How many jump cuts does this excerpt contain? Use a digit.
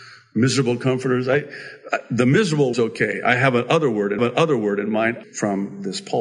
3